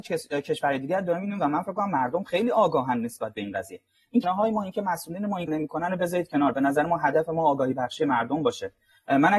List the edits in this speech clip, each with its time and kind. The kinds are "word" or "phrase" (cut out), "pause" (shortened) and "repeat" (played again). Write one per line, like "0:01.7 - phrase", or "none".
0:04.2 - word
0:05.5 - word